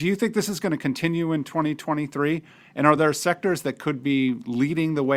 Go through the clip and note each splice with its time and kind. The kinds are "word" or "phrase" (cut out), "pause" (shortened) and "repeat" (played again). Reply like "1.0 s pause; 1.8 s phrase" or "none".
none